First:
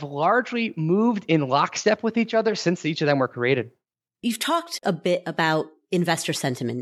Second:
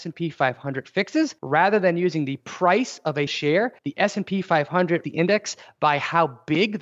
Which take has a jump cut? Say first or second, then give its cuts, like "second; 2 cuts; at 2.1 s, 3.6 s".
second; 4 cuts; at 1.4 s, 3.3 s, 3.8 s, 5.0 s